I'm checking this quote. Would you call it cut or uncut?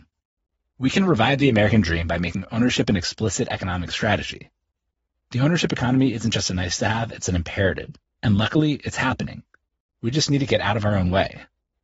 uncut